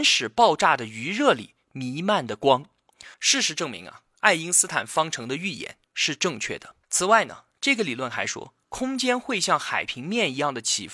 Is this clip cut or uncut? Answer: cut